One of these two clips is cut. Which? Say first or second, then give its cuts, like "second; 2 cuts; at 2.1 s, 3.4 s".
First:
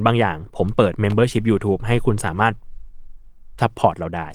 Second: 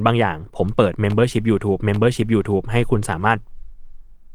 second; 1 cut; at 1.8 s